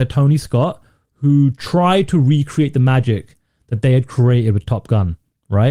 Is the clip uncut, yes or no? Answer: yes